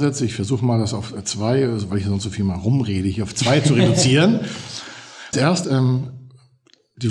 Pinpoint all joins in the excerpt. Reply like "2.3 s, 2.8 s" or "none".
5.3 s, 5.6 s